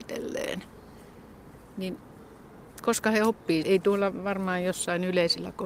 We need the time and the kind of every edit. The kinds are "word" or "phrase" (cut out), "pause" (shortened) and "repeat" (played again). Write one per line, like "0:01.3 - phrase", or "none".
0:03.6 - word

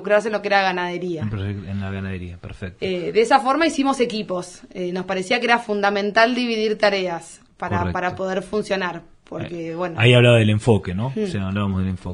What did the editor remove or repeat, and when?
none

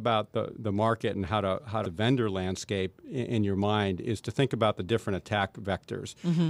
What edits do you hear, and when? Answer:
0:01.8 - phrase

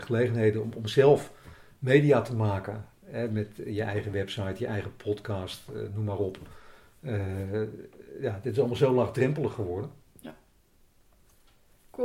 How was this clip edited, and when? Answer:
none

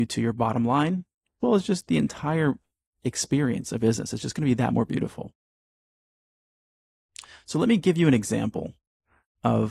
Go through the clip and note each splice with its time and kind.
0:01.4 - word
0:03.8 - word
0:04.7 - word

